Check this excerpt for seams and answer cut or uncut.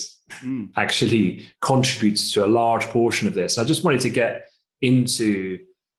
uncut